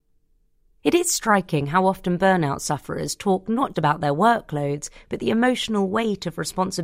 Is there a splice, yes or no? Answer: yes